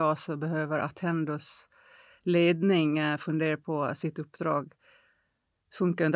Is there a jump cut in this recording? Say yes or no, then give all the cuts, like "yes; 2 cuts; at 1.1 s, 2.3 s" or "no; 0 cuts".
no; 0 cuts